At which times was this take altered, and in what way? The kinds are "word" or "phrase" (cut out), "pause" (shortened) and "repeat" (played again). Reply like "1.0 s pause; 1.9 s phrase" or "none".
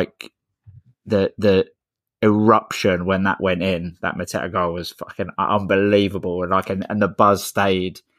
1.8 s pause